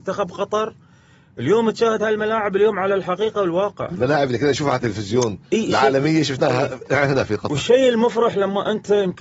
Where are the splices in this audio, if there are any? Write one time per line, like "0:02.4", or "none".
none